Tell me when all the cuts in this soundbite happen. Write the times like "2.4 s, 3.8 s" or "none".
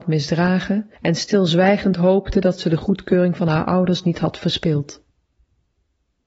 1.0 s